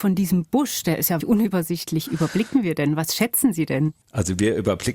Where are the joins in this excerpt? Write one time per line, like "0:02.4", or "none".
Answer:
0:01.2
0:04.0